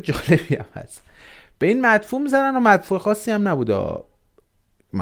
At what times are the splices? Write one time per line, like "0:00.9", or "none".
none